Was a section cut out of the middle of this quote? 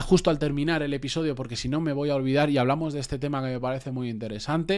no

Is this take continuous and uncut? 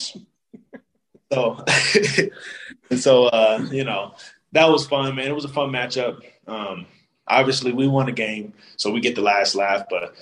yes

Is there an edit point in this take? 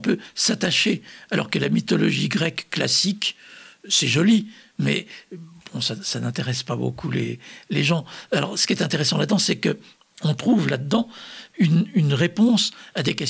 no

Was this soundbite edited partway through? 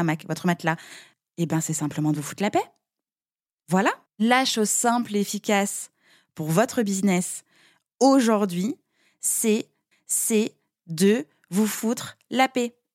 yes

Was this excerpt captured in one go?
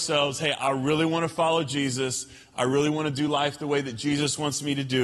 yes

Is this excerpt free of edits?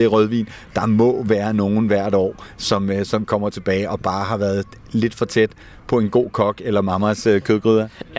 yes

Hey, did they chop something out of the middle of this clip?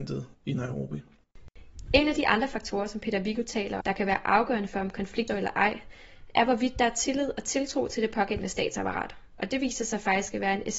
yes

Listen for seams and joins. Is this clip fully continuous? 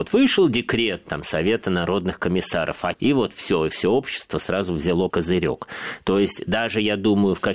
no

